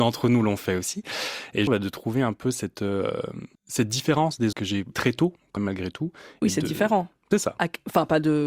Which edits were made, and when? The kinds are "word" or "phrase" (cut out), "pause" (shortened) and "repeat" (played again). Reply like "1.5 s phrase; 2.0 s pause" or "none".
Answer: 1.7 s word; 3.5 s pause; 4.5 s word; 4.9 s word; 5.6 s word